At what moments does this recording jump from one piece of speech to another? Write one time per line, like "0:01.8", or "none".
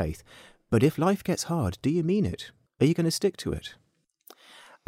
0:02.7